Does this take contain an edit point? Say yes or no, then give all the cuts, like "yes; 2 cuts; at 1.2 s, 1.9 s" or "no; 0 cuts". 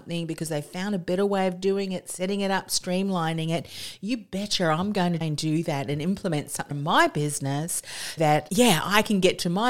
yes; 3 cuts; at 5.2 s, 6.7 s, 8.2 s